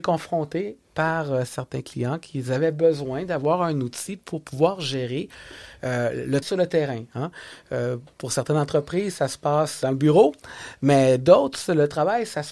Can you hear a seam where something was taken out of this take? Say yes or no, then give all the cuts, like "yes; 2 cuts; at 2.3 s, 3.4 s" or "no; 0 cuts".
yes; 2 cuts; at 6.4 s, 9.8 s